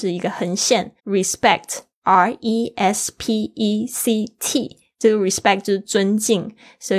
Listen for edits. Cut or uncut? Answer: cut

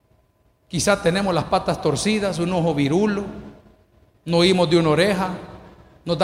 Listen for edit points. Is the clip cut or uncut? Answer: uncut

